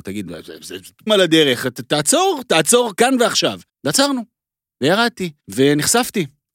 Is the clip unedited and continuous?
no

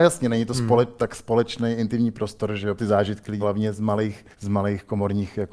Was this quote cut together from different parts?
yes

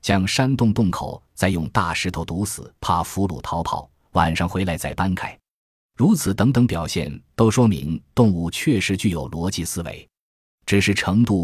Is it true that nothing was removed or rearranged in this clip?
no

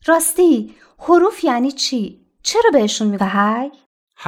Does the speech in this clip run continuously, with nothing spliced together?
no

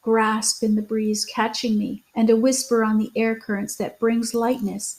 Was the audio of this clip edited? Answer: yes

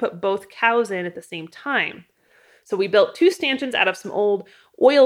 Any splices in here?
no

